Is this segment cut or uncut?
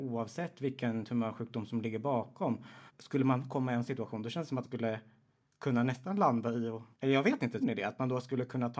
cut